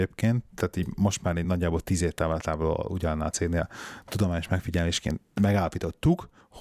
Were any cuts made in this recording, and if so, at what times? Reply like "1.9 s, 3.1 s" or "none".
none